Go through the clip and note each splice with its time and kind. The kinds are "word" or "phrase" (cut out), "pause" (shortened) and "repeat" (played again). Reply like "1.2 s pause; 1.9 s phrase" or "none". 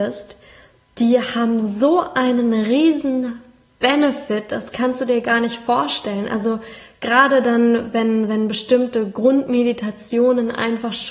none